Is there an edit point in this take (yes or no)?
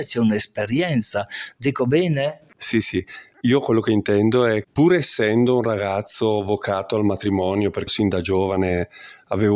yes